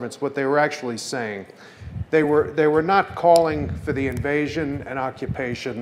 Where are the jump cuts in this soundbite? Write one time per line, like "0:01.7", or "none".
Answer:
none